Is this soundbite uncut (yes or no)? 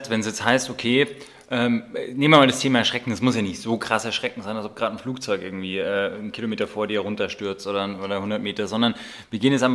yes